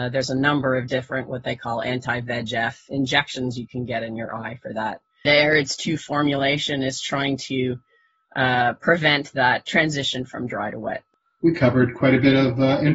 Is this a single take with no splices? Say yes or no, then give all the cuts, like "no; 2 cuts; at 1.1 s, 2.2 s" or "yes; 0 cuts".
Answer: yes; 0 cuts